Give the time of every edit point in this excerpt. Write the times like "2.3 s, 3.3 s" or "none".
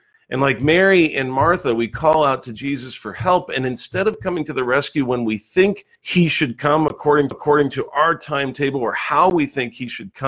5.9 s, 7.3 s

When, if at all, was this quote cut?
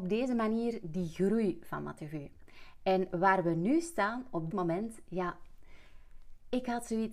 4.5 s

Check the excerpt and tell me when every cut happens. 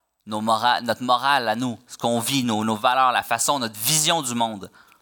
none

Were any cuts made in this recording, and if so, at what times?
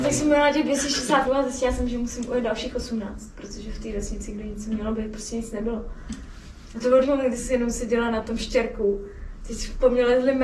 1.2 s, 7.0 s, 7.4 s

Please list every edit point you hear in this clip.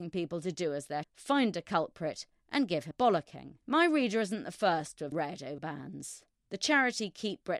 1.0 s, 2.9 s, 3.6 s, 5.1 s, 5.6 s

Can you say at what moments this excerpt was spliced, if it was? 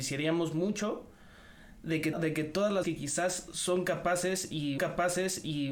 2.1 s, 2.8 s, 4.8 s

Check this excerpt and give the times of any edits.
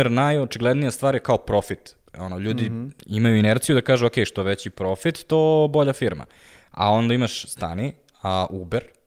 none

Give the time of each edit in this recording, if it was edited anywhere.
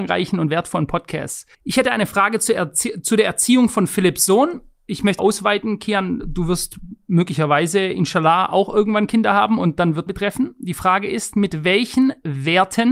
1.5 s, 5.2 s, 10.1 s

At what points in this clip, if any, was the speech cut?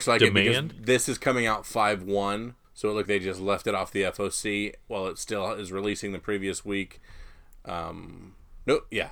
2.6 s, 3.1 s

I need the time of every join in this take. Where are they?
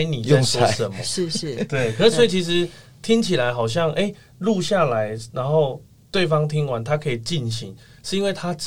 none

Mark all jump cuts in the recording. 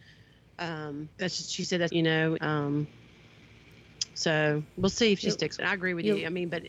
1.1 s, 1.9 s, 2.4 s, 5.6 s

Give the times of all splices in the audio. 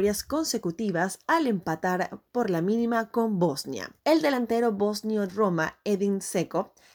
4.0 s, 5.3 s

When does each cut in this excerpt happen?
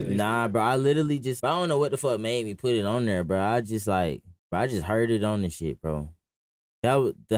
1.4 s, 4.4 s

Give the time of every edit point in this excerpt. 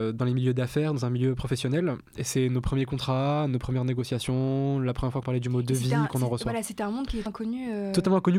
5.2 s, 7.3 s

